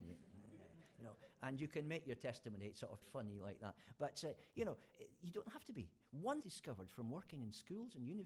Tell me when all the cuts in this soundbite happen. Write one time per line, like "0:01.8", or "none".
0:03.0
0:04.9
0:06.4